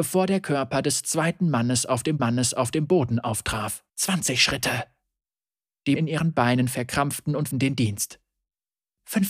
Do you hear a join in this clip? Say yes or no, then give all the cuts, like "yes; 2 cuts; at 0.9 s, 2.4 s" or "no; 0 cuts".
yes; 4 cuts; at 2.2 s, 3.9 s, 6.0 s, 7.5 s